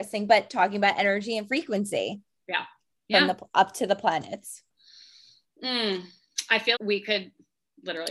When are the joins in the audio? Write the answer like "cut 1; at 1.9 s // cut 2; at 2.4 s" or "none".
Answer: cut 1; at 6.7 s